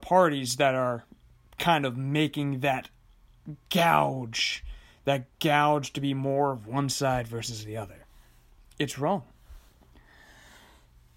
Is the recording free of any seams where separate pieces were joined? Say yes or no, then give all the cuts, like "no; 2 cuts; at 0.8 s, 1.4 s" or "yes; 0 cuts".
yes; 0 cuts